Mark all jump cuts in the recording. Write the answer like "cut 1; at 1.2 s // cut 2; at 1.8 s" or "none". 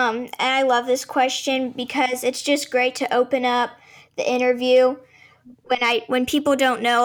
none